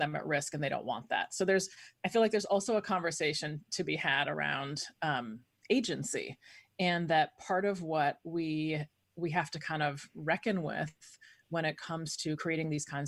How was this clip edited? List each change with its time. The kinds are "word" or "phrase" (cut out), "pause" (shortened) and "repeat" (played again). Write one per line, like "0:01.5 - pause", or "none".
none